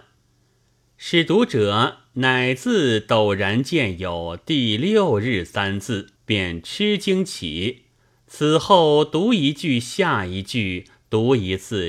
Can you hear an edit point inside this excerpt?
yes; 2 cuts; at 6.1 s, 8.0 s

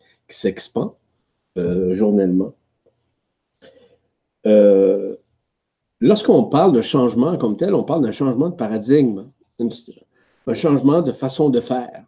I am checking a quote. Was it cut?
no; 0 cuts

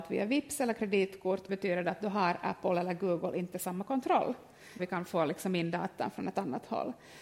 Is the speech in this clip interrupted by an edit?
yes; 2 cuts; at 1.5 s, 4.8 s

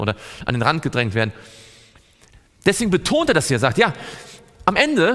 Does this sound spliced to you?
no; 0 cuts

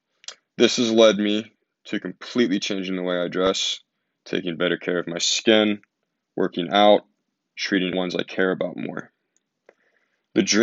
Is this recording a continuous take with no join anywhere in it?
no; 1 cut; at 7.9 s

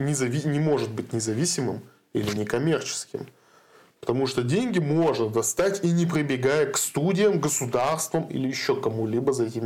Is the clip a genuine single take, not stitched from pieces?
yes; 0 cuts

